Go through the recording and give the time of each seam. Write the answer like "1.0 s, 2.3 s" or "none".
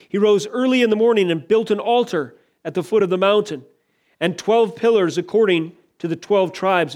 none